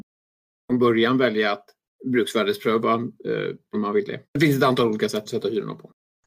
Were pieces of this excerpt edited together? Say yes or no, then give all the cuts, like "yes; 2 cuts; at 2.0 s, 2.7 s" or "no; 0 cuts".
yes; 3 cuts; at 3.7 s, 4.2 s, 5.3 s